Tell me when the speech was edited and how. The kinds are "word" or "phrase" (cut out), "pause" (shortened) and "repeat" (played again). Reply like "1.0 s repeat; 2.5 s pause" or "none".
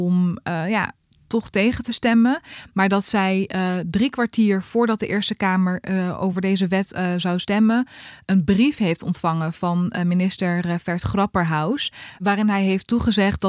none